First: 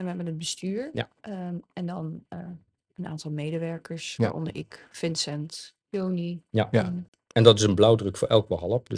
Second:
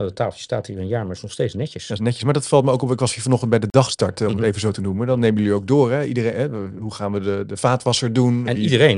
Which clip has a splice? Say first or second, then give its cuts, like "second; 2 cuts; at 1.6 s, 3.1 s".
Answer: first; 2 cuts; at 1.2 s, 5.8 s